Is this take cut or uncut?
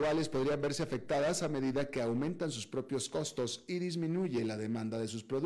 uncut